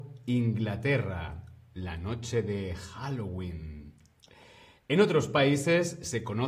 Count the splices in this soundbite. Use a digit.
0